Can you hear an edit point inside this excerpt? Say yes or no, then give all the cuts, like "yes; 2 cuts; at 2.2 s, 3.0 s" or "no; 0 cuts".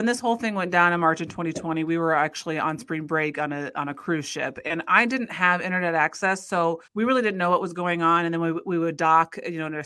yes; 1 cut; at 6.9 s